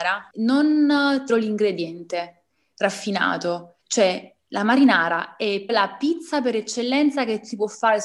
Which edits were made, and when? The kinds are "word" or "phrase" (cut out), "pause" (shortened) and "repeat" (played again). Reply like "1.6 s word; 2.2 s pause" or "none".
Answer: 1.3 s phrase; 3.8 s pause; 5.7 s word